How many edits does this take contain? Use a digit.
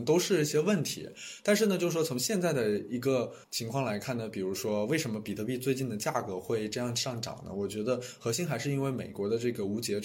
1